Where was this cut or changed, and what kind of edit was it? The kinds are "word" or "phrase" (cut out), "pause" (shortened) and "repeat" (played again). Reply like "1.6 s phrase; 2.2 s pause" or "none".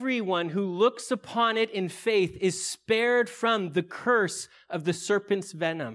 none